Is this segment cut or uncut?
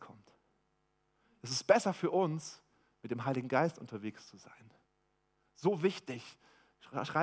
uncut